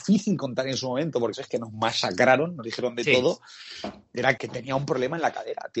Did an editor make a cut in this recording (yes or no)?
yes